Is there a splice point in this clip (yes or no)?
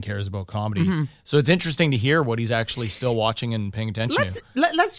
no